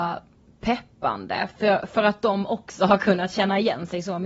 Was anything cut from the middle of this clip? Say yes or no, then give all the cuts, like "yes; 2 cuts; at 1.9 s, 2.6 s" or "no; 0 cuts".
no; 0 cuts